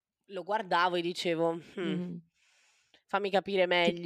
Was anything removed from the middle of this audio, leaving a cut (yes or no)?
no